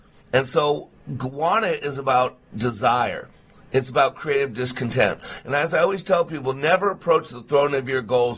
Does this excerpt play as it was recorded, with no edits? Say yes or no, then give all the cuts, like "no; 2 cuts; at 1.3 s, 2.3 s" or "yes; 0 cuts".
yes; 0 cuts